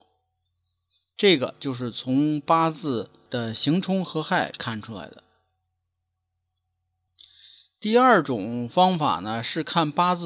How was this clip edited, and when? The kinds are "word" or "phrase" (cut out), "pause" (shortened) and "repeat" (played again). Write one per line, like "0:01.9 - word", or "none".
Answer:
none